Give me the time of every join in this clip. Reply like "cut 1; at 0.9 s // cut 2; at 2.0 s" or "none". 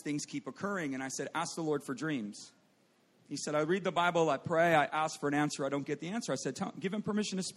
none